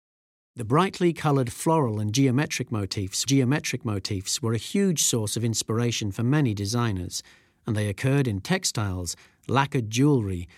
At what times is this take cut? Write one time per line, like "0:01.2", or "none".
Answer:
0:03.3
0:08.4